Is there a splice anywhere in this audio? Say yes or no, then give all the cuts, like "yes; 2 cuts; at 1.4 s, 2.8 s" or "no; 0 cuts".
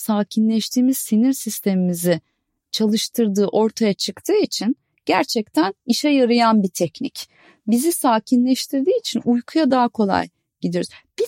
no; 0 cuts